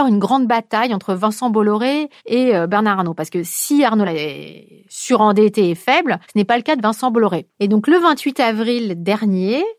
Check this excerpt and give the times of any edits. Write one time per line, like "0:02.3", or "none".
0:02.2
0:04.0
0:06.2
0:07.5